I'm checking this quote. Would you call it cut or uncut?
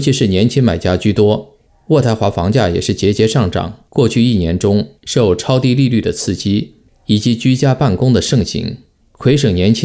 cut